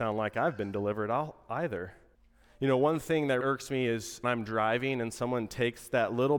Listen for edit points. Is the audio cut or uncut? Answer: cut